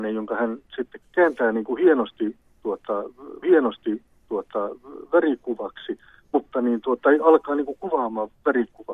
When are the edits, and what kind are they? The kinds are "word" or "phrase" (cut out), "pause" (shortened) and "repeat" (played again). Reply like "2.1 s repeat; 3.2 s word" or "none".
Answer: 1.0 s word; 3.4 s repeat